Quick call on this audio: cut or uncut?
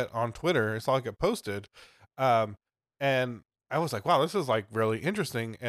uncut